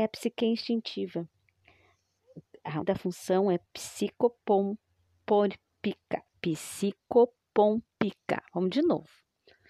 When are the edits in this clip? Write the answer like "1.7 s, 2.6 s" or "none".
2.8 s, 6.3 s